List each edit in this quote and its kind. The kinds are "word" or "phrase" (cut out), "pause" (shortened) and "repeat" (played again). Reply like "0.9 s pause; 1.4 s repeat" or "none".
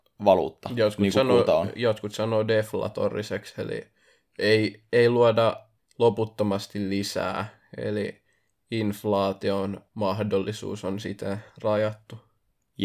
9.9 s pause